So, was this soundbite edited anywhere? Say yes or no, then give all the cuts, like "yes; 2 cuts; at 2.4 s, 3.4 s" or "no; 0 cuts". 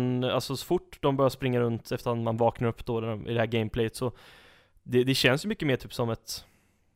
no; 0 cuts